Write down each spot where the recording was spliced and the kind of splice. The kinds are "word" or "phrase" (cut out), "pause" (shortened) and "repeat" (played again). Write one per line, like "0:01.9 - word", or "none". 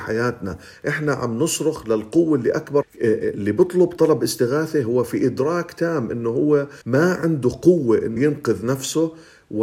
0:02.8 - word
0:06.8 - pause
0:08.2 - word

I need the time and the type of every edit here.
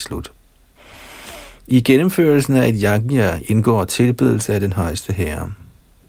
none

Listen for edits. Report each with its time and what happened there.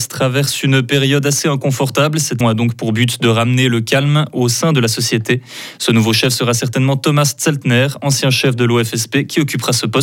0:02.4 - word

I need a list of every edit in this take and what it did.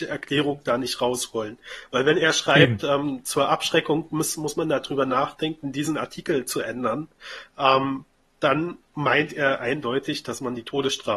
none

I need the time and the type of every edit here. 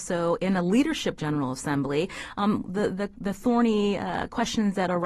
0:01.2 - phrase

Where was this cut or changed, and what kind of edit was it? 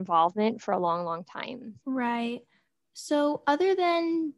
0:01.8 - pause

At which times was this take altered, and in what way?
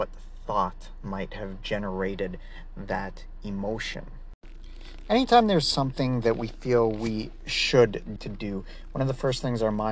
0:08.2 - phrase

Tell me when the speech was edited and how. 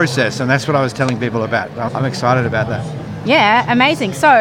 0:01.9 - word

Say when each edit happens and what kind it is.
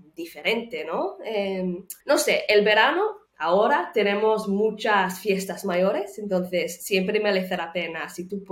0:02.0 - pause
0:03.3 - pause

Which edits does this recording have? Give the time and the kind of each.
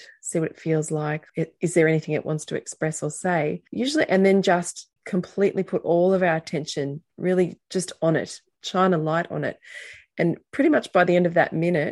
0:01.3 - pause
0:05.0 - pause
0:07.6 - pause

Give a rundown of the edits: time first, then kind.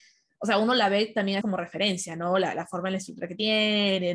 0:01.4 - word

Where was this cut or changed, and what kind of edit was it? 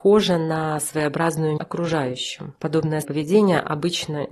0:01.6 - word
0:03.0 - word

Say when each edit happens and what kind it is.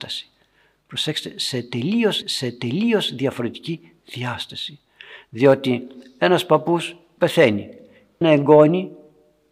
0:02.2 - repeat
0:07.2 - word
0:08.2 - phrase

